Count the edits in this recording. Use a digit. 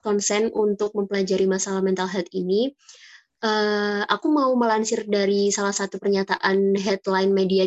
0